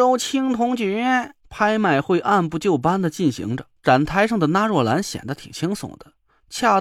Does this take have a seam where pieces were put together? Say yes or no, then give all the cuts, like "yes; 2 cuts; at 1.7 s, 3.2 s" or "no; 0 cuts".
yes; 2 cuts; at 1.4 s, 3.8 s